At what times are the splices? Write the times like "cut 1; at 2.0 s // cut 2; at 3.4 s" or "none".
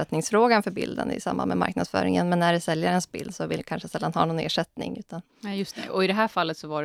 cut 1; at 3.6 s // cut 2; at 5.3 s